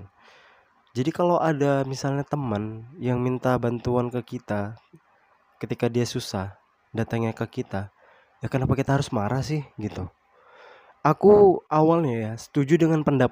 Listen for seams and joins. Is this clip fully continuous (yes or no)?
yes